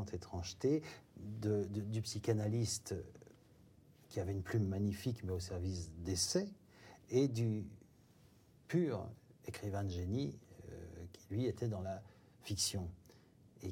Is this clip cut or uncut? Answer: uncut